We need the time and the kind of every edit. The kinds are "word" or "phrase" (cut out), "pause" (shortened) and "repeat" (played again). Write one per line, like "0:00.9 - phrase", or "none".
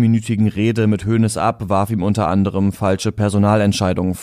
none